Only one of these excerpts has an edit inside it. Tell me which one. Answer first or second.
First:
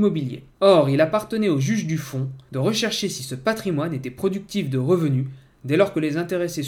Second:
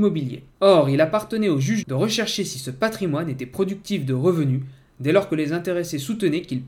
second